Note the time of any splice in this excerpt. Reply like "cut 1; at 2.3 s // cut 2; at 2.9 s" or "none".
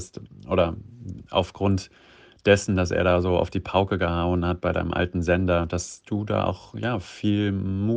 none